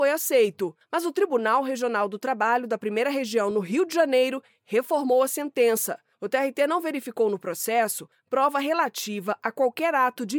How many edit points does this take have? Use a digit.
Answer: 0